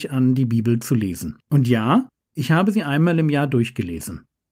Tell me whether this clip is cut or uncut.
cut